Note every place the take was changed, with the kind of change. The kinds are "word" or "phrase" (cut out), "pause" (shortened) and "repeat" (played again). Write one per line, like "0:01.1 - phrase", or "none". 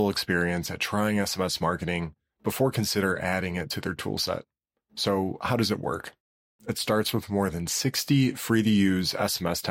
none